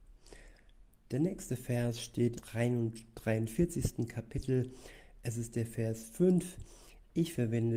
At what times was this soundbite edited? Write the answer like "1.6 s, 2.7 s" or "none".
2.3 s